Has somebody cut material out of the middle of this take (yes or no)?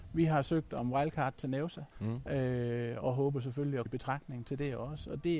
yes